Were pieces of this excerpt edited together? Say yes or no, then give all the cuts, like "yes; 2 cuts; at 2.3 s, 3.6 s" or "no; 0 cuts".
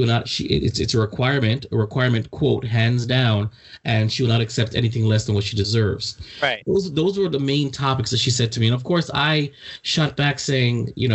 no; 0 cuts